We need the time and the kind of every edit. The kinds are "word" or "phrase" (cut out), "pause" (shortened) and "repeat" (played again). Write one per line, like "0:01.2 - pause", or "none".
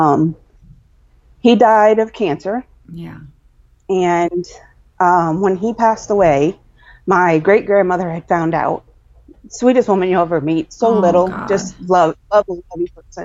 none